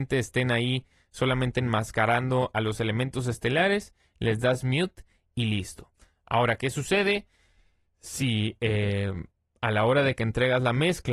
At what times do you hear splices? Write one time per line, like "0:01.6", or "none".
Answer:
none